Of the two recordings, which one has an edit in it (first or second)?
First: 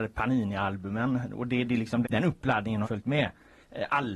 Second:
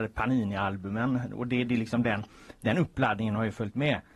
first